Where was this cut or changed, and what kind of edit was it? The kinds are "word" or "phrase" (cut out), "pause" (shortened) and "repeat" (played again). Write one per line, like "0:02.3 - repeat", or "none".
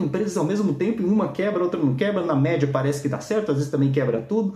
none